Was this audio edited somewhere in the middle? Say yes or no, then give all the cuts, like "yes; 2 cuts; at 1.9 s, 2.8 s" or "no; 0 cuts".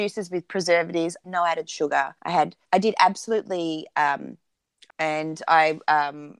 yes; 4 cuts; at 1.2 s, 2.2 s, 2.6 s, 4.9 s